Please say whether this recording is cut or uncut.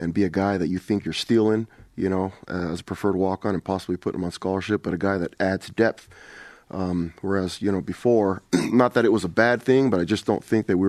uncut